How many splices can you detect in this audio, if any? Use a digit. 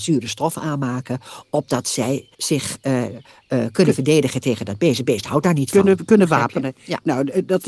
1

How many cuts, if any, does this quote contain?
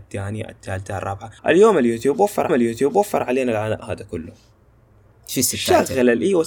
2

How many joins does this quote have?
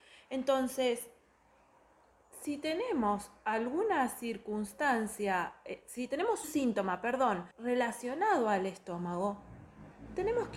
2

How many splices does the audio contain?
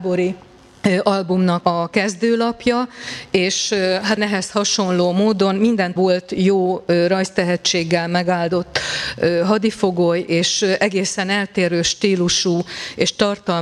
3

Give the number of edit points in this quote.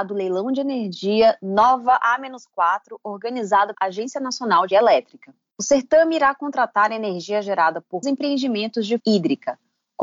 5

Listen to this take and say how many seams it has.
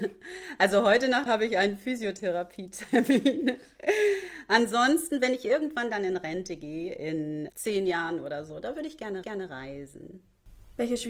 3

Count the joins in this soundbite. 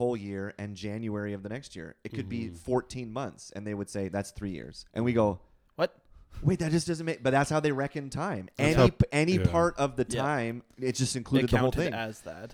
1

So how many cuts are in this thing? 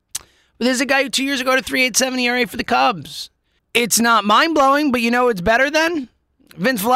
1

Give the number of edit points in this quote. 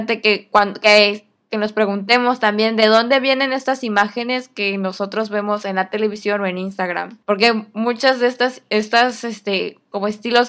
1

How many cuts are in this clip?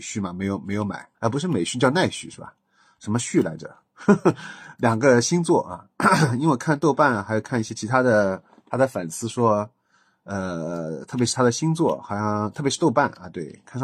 1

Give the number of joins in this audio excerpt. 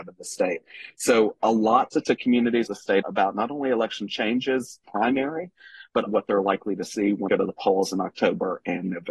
6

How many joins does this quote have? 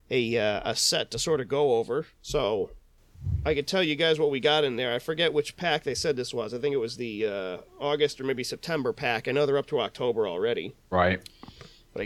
2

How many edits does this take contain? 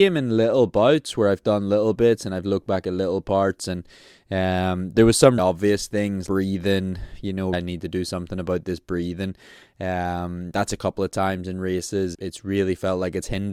4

